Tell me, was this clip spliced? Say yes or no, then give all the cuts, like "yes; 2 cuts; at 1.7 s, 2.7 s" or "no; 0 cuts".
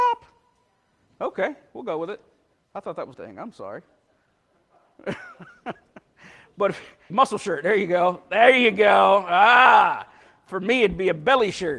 yes; 3 cuts; at 2.5 s, 3.1 s, 7.1 s